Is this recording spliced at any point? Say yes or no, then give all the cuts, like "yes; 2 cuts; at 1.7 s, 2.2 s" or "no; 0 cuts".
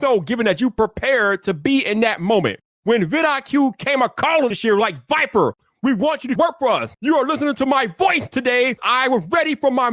yes; 4 cuts; at 4.5 s, 6.4 s, 6.9 s, 8.8 s